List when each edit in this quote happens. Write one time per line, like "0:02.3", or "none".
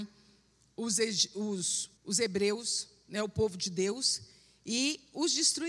0:02.0